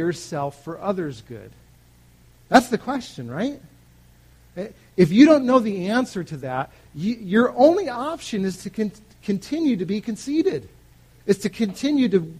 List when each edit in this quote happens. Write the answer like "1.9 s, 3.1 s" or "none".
none

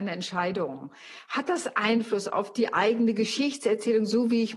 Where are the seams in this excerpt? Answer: none

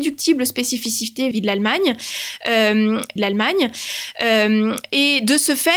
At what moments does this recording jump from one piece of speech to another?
1.3 s, 3.2 s

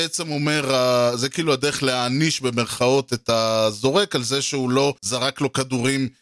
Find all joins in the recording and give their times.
5.0 s

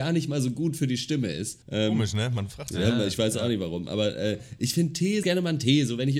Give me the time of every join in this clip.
1.6 s, 5.2 s

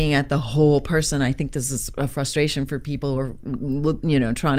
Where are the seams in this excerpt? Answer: none

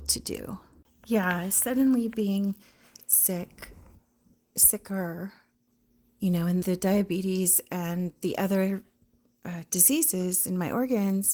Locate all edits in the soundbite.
6.6 s

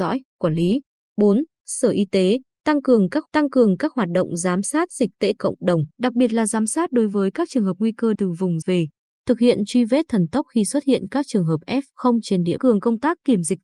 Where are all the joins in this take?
3.3 s, 5.4 s, 5.9 s, 8.1 s, 8.6 s, 12.6 s

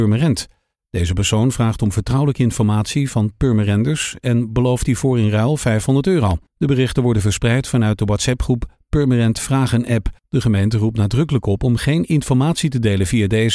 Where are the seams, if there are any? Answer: 6.5 s, 10.2 s

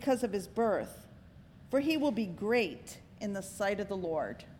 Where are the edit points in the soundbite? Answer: none

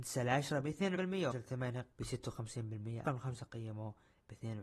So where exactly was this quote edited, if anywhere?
1.0 s, 1.3 s, 1.9 s, 3.1 s

